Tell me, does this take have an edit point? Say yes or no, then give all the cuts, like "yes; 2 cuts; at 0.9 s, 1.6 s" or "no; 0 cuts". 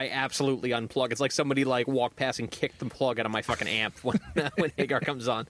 no; 0 cuts